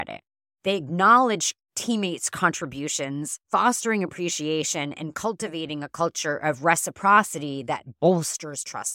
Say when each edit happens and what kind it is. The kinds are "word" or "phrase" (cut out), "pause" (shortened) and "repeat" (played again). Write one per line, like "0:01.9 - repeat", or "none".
0:01.6 - pause
0:03.4 - pause